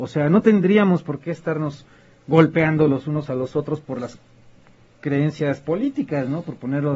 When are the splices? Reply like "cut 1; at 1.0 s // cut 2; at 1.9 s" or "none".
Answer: none